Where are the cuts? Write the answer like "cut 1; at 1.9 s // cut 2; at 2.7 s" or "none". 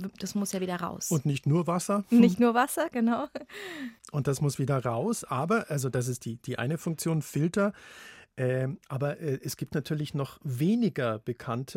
cut 1; at 4.0 s